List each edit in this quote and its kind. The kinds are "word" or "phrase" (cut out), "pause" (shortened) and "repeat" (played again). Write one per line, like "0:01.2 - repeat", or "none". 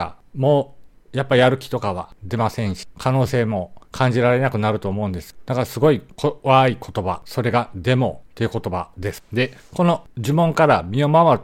0:03.8 - pause